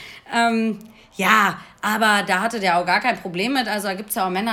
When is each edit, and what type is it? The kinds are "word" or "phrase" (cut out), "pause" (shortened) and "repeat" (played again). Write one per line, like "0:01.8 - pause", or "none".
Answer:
none